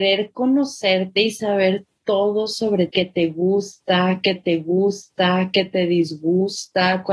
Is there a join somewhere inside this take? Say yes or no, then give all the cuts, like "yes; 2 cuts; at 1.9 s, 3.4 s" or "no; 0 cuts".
yes; 2 cuts; at 2.9 s, 4.4 s